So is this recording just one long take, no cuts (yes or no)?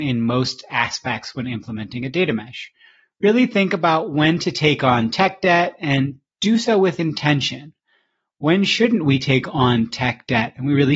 yes